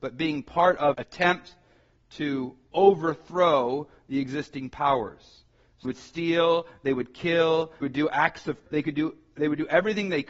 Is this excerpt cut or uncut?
cut